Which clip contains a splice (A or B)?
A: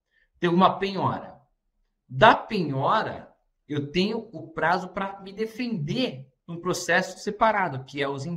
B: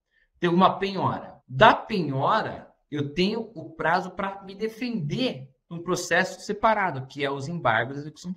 B